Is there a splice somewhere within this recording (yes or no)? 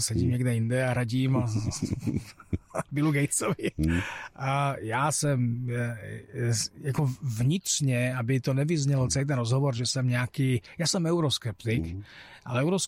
no